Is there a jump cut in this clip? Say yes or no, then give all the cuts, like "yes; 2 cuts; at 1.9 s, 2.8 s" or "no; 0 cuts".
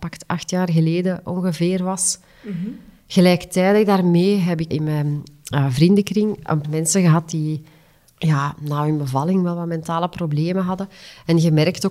yes; 2 cuts; at 4.7 s, 6.6 s